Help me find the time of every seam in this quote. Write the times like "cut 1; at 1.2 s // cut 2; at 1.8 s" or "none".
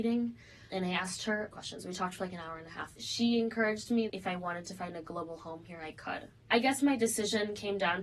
cut 1; at 1.5 s // cut 2; at 4.1 s